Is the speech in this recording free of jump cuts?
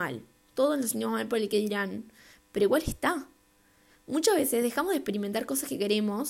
yes; 0 cuts

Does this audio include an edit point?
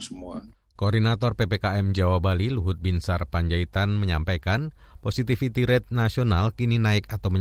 no; 0 cuts

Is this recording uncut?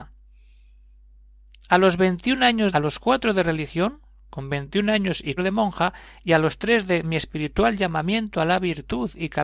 no; 2 cuts; at 2.7 s, 5.4 s

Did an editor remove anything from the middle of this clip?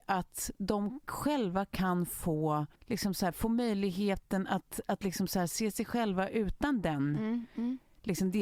yes; 1 cut; at 2.8 s

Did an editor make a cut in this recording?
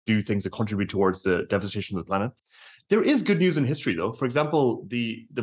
no; 0 cuts

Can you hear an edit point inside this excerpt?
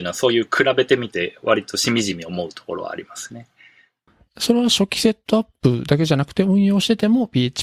no; 0 cuts

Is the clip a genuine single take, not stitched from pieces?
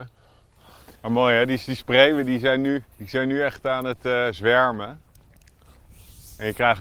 no; 2 cuts; at 1.0 s, 2.9 s

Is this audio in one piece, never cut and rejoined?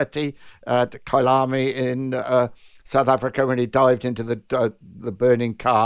yes; 0 cuts

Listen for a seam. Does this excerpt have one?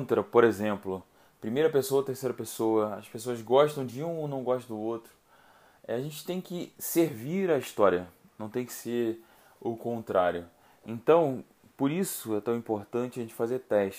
no; 0 cuts

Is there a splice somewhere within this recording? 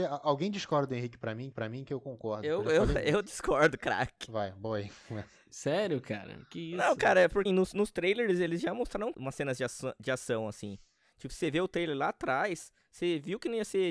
yes; 3 cuts; at 1.5 s, 7.5 s, 9.1 s

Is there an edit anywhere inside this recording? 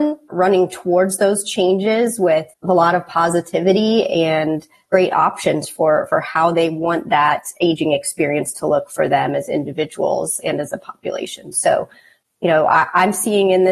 no; 0 cuts

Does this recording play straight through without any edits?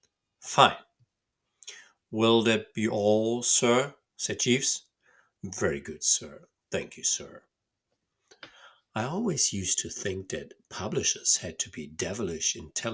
yes; 0 cuts

